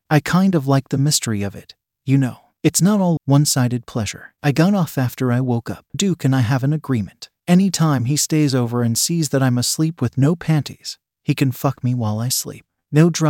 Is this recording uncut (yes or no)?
no